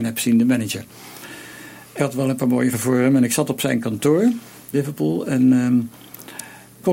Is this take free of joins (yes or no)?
no